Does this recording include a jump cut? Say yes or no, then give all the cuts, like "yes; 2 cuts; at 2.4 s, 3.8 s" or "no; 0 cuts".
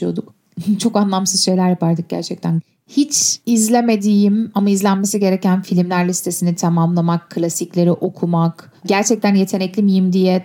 no; 0 cuts